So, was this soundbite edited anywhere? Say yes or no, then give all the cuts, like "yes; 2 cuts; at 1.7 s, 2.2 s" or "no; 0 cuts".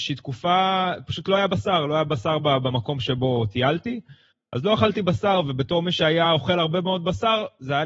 no; 0 cuts